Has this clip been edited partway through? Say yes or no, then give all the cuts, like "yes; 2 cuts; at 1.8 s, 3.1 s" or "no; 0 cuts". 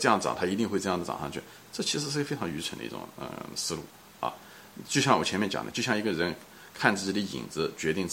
no; 0 cuts